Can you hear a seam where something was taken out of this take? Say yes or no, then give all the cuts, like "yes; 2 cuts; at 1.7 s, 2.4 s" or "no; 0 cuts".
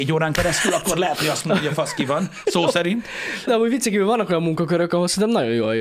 yes; 1 cut; at 3.5 s